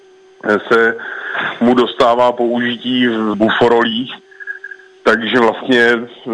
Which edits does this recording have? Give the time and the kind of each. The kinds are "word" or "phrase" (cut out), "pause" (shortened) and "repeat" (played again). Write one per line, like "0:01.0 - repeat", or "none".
0:03.3 - word